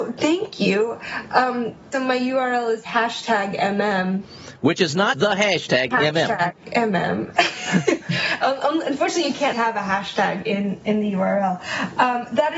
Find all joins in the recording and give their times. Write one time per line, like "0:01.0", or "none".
0:01.9
0:05.1
0:05.9
0:09.5

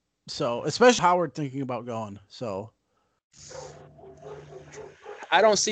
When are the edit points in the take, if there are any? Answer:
0:01.0

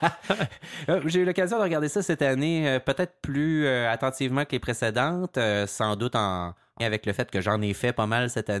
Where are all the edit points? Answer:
0:06.8

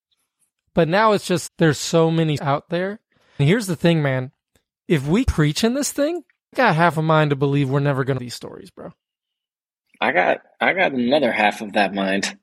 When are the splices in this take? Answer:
0:01.5
0:02.4
0:03.4
0:05.3
0:06.5
0:08.2

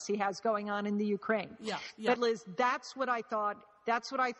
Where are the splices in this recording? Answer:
0:02.1

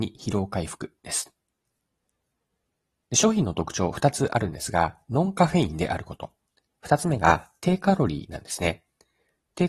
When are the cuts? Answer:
none

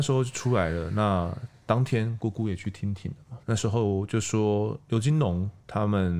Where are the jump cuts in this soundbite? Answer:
0:03.4

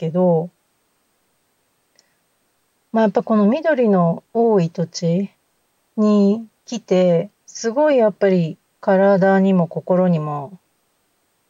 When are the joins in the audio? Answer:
0:04.3
0:07.4
0:08.7

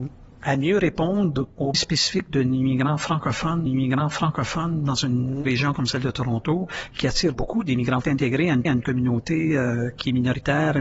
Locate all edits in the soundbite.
0:01.7
0:03.7
0:05.5
0:07.3
0:08.0
0:08.7

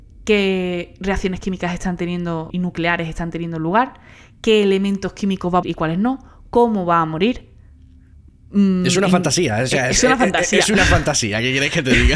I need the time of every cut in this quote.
0:02.5
0:05.6

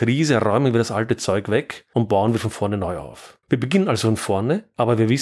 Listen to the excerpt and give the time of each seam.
0:03.4

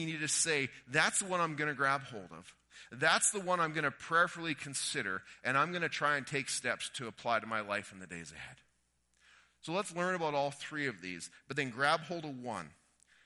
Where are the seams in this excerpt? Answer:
none

